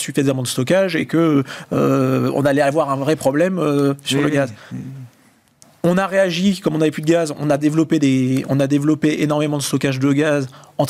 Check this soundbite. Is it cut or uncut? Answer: uncut